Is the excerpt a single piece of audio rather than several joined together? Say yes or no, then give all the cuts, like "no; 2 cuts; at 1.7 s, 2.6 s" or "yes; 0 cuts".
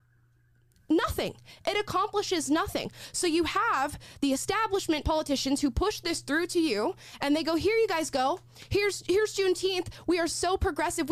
yes; 0 cuts